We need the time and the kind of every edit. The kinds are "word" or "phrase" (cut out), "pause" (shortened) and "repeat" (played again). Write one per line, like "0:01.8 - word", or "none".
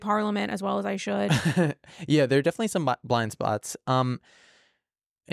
none